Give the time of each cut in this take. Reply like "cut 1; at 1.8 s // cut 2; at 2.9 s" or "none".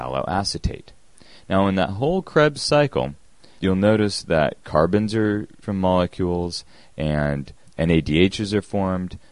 cut 1; at 3.6 s // cut 2; at 5.6 s // cut 3; at 7.7 s

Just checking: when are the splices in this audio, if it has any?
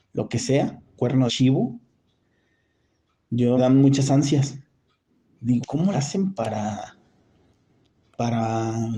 cut 1; at 1.0 s // cut 2; at 1.3 s // cut 3; at 3.6 s // cut 4; at 5.6 s // cut 5; at 5.9 s

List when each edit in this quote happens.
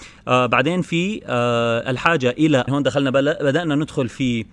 cut 1; at 2.7 s

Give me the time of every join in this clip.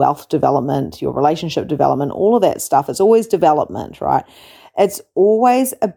none

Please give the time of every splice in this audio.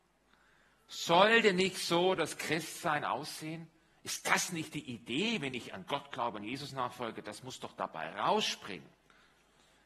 none

